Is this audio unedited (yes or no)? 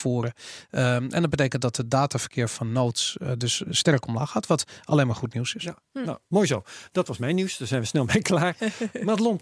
yes